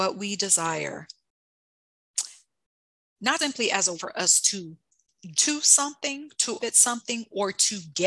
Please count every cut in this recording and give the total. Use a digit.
4